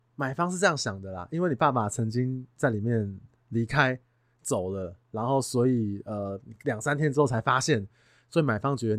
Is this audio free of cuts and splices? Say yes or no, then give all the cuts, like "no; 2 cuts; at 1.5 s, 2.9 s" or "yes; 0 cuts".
yes; 0 cuts